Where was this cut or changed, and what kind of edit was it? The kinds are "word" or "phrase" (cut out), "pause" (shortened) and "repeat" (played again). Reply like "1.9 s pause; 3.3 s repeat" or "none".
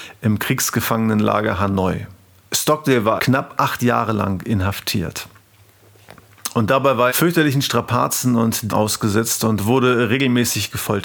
3.2 s word; 7.1 s word; 8.7 s word